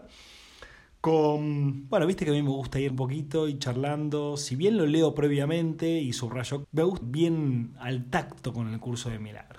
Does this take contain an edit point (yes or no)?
yes